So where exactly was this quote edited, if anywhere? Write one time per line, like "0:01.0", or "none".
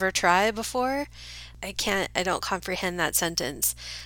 none

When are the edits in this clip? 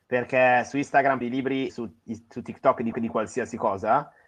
0:01.2
0:01.7
0:02.9

